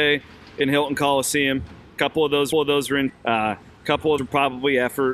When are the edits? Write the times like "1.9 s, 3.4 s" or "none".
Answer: 2.5 s, 3.1 s, 4.2 s